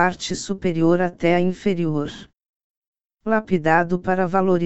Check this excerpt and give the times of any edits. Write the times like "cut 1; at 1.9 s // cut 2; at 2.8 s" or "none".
none